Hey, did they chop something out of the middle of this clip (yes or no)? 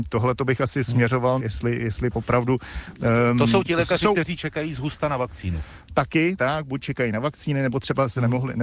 yes